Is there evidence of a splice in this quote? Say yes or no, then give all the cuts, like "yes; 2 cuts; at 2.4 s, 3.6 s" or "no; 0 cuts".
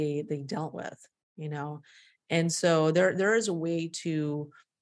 no; 0 cuts